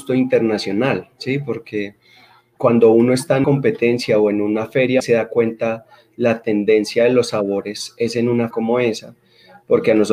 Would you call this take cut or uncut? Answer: cut